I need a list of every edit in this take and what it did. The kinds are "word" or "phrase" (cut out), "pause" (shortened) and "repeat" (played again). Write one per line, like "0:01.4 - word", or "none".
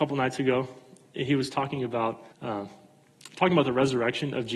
0:02.3 - pause